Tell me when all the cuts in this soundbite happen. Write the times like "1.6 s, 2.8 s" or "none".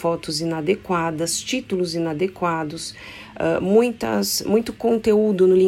none